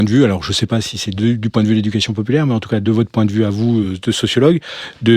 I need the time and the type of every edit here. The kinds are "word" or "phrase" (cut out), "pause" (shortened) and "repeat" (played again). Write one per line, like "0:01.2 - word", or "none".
none